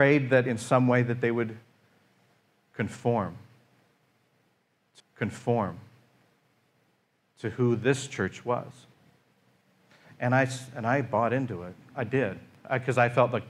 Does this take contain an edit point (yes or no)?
yes